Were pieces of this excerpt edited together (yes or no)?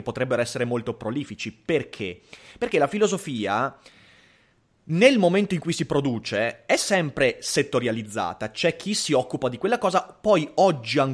no